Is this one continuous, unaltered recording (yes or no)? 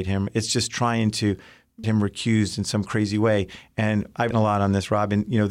no